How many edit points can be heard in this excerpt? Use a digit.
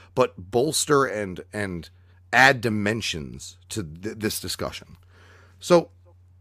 0